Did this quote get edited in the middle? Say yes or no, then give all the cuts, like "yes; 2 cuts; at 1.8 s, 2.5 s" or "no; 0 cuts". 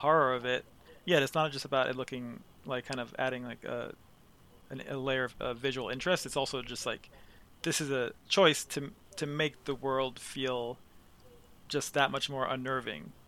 no; 0 cuts